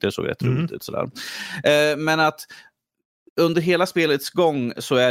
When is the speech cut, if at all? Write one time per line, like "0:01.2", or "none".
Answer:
none